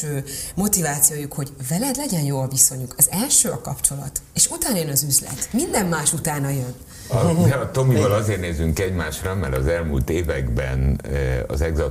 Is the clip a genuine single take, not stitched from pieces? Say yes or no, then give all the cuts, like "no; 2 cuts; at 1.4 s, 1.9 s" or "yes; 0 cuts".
yes; 0 cuts